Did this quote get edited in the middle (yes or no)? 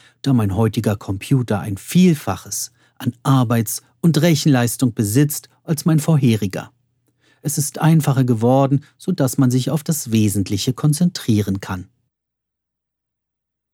no